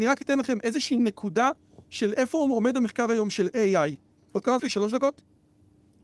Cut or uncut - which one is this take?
cut